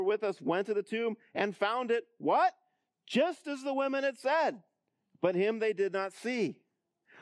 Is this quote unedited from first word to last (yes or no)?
yes